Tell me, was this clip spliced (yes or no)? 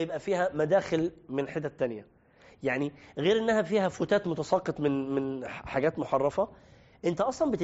no